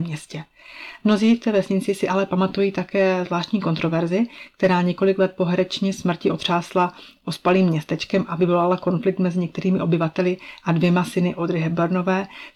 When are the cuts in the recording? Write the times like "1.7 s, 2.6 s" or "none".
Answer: none